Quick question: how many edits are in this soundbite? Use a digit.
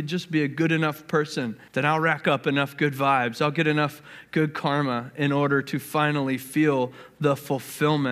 1